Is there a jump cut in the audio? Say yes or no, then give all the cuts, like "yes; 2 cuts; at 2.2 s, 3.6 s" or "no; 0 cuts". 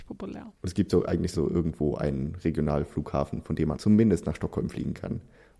yes; 2 cuts; at 1.3 s, 3.8 s